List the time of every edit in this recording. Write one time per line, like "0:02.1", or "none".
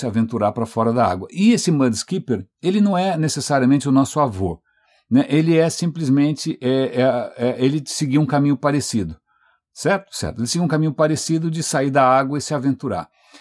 none